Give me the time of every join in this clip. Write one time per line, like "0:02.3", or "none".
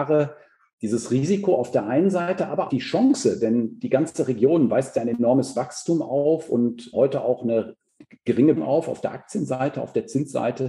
0:02.7
0:06.9
0:08.6